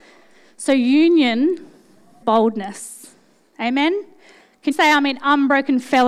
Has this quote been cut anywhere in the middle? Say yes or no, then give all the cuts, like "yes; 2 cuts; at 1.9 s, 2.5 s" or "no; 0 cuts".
yes; 2 cuts; at 2.2 s, 4.7 s